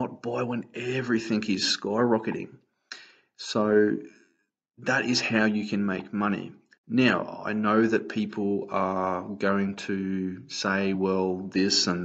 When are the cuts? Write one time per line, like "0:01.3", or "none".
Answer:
none